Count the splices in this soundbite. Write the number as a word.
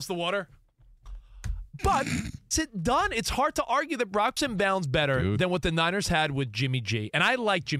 two